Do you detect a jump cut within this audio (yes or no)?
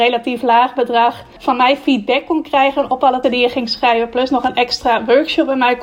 yes